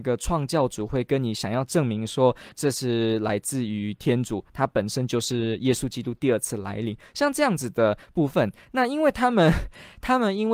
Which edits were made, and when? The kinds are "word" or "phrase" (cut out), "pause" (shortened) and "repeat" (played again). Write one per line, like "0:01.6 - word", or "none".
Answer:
0:02.5 - word

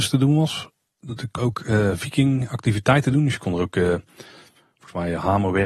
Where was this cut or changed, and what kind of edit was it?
0:01.4 - word

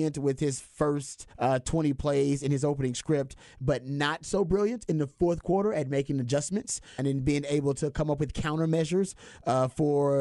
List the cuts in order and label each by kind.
0:01.3 - pause
0:07.0 - word

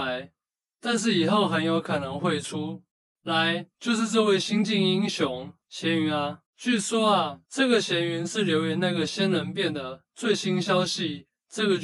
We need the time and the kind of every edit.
0:03.0 - pause
0:05.6 - pause
0:06.5 - pause
0:07.5 - pause

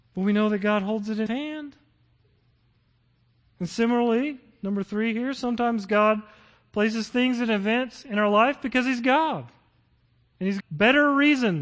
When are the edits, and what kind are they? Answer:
0:01.3 - word
0:10.6 - word

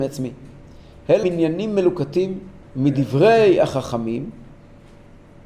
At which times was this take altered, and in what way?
0:01.2 - word
0:02.6 - pause

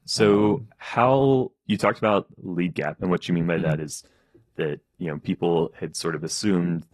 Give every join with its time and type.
0:01.7 - word
0:03.0 - word

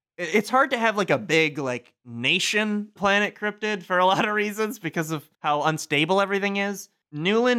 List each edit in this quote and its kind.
0:03.0 - word
0:05.3 - pause

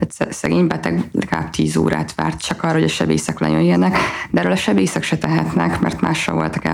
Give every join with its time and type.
none

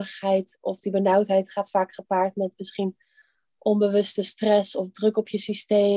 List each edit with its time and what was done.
none

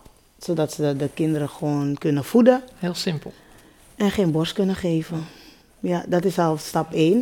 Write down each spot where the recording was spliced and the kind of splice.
0:05.6 - pause

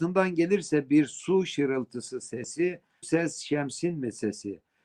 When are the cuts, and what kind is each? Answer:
0:03.0 - word

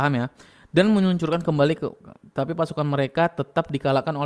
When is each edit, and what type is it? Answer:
none

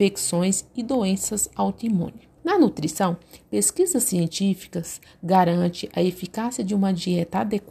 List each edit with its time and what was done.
0:02.4 - pause

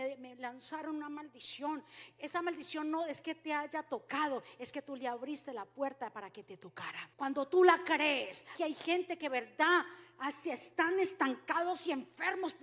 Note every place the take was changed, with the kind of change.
0:07.1 - pause
0:08.6 - word

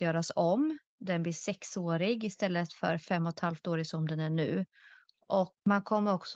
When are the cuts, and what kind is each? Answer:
none

